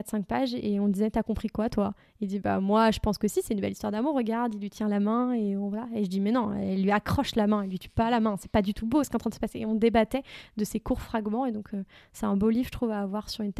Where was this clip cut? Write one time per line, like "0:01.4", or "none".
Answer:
none